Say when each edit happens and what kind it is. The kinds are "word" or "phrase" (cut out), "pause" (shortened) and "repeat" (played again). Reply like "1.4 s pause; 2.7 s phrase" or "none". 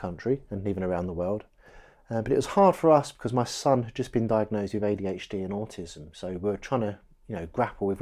1.9 s pause